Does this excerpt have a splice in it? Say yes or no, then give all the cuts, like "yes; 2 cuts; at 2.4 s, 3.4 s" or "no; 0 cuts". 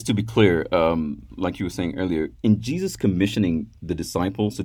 no; 0 cuts